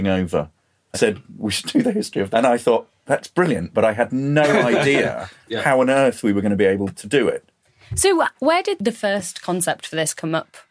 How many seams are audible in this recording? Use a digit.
3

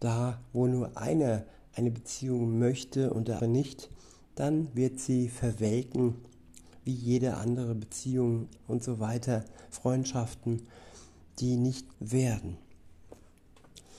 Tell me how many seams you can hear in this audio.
3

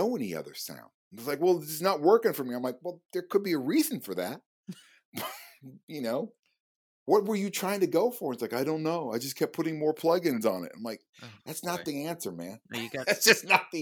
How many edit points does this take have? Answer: 0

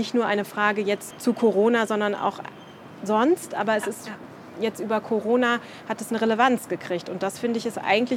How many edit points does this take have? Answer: 1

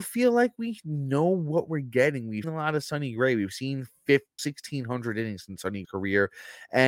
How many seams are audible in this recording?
3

